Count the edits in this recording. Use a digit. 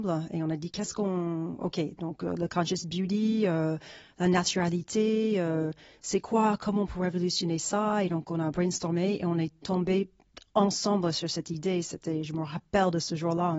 1